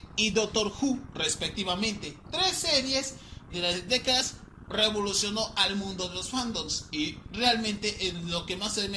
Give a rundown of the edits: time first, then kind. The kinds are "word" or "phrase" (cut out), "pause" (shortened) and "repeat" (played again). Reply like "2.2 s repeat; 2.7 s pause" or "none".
3.5 s word; 3.9 s phrase